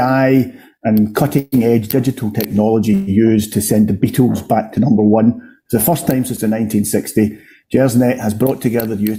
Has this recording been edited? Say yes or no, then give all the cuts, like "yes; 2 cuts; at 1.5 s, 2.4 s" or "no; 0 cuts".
no; 0 cuts